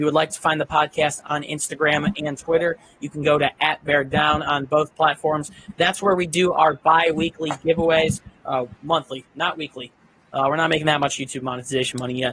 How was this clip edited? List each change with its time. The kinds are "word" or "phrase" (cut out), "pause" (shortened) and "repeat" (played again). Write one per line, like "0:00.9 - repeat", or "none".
none